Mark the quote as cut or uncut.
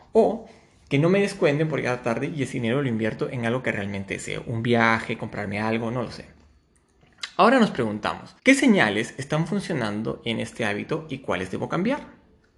cut